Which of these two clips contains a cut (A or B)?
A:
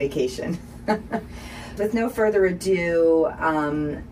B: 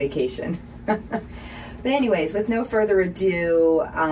A